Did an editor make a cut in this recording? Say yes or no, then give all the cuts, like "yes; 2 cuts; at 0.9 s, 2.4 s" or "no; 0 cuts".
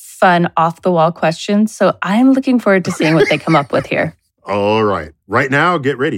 no; 0 cuts